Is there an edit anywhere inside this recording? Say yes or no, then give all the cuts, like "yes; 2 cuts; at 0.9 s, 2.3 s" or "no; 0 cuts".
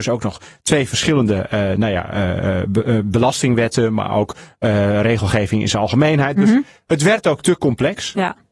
no; 0 cuts